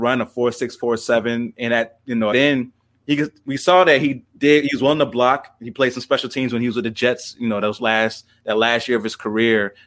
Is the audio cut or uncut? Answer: cut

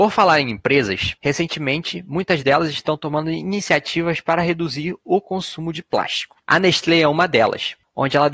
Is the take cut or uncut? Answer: cut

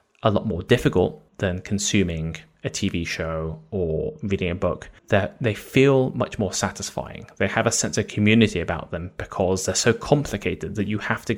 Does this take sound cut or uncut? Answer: cut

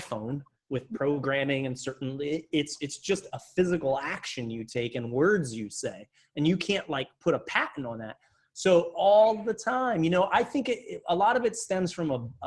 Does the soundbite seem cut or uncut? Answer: uncut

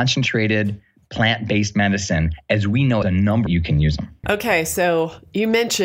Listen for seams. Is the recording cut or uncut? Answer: cut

